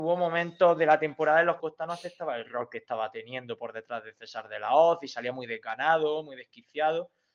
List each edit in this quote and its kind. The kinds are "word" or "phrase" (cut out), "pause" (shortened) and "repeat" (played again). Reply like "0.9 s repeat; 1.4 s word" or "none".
1.6 s phrase